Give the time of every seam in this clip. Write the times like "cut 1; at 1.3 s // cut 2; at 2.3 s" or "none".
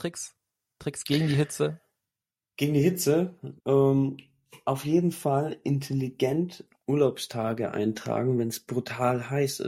cut 1; at 3.6 s